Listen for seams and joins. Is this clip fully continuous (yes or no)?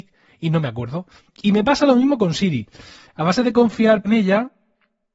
no